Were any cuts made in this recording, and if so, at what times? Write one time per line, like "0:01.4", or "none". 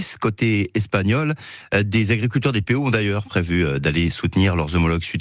none